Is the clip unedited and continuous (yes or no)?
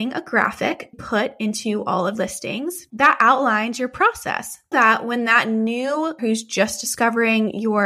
no